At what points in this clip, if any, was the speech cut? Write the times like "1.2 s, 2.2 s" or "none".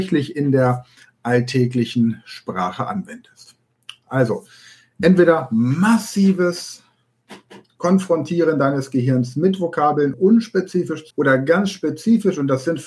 10.1 s, 11.1 s